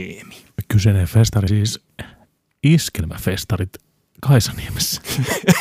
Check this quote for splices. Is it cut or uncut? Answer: cut